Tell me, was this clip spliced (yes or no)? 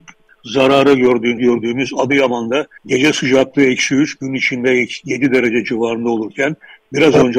yes